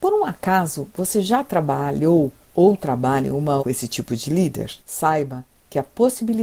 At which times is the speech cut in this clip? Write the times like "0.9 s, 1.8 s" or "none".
3.6 s, 4.8 s